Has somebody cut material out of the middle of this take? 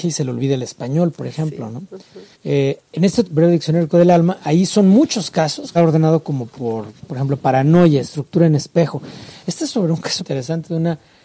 yes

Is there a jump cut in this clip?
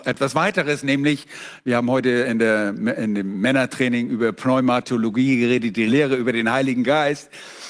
yes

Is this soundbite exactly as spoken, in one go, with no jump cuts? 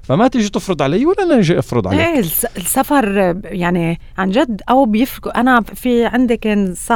yes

